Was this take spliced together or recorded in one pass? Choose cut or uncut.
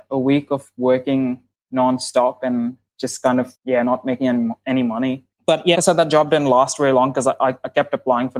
cut